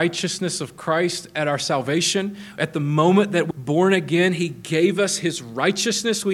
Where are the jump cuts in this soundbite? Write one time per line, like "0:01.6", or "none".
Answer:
0:03.5